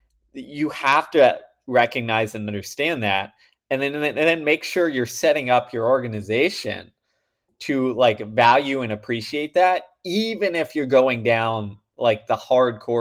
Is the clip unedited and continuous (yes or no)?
yes